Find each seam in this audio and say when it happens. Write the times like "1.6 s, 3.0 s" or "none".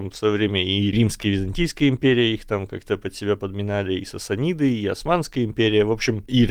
none